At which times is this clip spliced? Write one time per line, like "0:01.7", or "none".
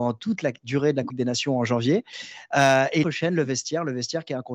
0:01.1
0:03.0